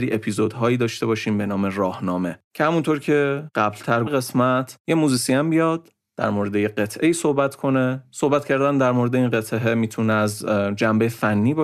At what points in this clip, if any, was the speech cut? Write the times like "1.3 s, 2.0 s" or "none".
2.5 s, 4.1 s

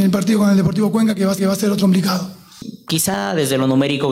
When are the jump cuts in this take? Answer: 1.4 s, 1.8 s

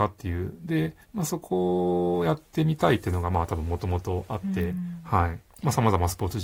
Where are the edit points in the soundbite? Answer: 1.0 s

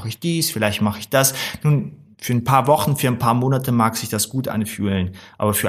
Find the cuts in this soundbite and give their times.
none

